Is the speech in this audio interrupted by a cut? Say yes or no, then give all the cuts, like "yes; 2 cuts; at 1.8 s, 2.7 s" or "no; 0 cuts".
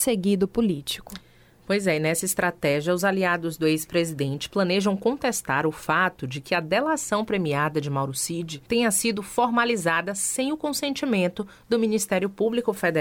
yes; 1 cut; at 8.7 s